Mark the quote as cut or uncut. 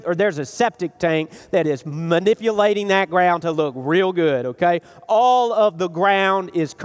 uncut